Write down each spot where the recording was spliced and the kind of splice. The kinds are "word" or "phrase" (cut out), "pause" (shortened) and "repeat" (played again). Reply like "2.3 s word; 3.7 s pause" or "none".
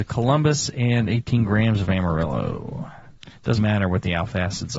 3.6 s word